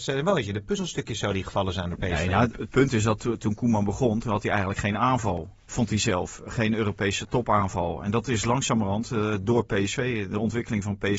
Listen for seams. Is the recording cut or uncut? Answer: cut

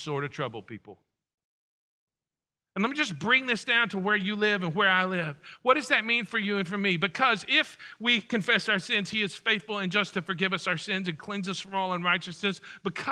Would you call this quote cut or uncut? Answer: uncut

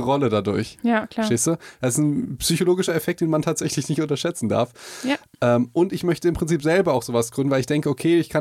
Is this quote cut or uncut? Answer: uncut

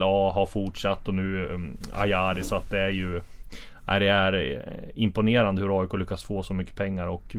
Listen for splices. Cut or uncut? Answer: uncut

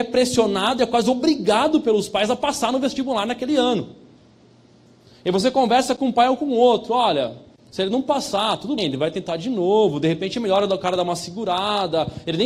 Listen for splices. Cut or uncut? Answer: cut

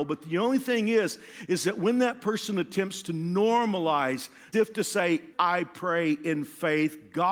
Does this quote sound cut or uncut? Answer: cut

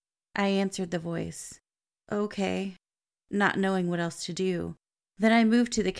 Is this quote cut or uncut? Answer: uncut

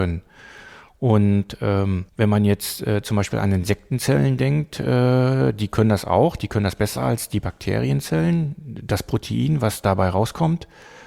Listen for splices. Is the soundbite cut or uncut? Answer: cut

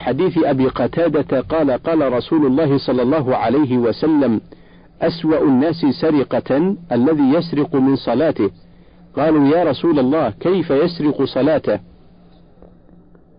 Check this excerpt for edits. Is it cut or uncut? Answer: uncut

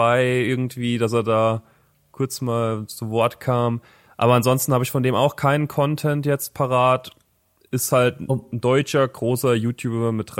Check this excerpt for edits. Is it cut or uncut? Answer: uncut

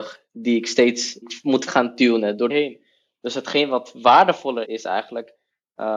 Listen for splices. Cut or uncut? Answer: cut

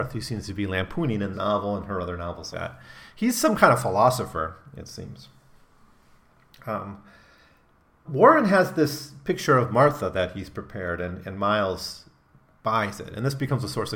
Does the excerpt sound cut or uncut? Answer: cut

